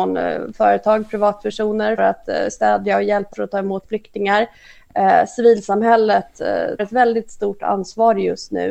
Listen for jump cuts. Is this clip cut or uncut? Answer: cut